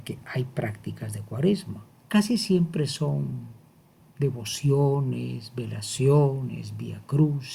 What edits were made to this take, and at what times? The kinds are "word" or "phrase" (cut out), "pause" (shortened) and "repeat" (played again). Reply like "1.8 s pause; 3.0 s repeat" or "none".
none